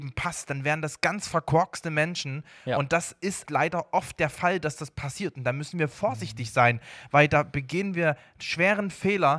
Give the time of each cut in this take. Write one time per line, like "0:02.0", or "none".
0:03.5